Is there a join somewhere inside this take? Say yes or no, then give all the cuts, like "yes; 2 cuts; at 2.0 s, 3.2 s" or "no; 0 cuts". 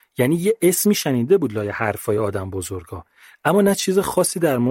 no; 0 cuts